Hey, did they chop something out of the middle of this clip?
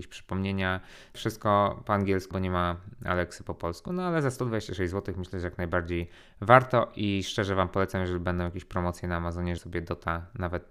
yes; 3 cuts; at 1.1 s, 2.3 s, 9.6 s

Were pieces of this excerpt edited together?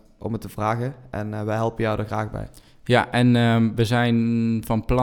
no; 0 cuts

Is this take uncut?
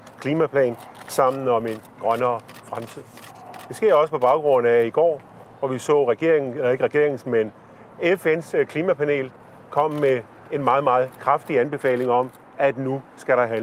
yes; 0 cuts

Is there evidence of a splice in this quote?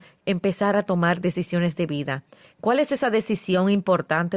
no; 0 cuts

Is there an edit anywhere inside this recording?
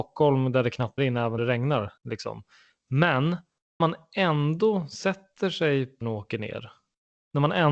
yes; 5 cuts; at 1.0 s, 1.4 s, 2.0 s, 3.8 s, 6.0 s

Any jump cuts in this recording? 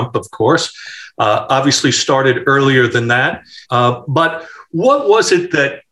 yes; 1 cut; at 3.6 s

